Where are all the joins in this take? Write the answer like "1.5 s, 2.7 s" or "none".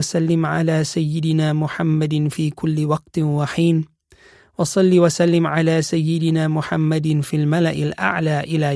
none